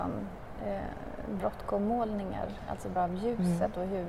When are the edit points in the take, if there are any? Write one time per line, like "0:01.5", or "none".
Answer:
0:01.4
0:03.0